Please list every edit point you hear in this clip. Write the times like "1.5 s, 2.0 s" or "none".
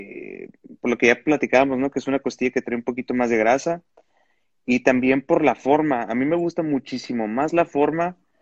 none